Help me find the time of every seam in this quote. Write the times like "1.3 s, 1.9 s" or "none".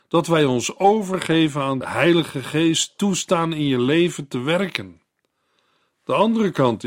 1.8 s